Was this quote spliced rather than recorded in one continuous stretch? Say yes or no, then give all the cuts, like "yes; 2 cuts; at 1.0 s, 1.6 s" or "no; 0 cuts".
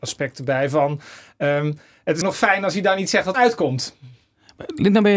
yes; 2 cuts; at 2.2 s, 3.3 s